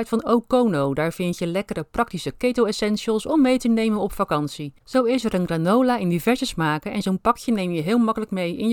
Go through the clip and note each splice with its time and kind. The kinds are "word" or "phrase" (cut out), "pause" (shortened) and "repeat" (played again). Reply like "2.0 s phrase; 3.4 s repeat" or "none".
4.8 s pause